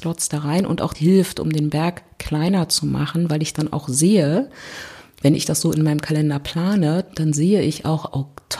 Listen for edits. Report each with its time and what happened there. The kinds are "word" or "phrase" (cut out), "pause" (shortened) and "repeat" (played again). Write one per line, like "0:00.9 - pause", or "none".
0:00.9 - word